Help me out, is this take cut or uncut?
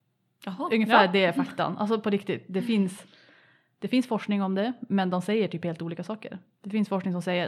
uncut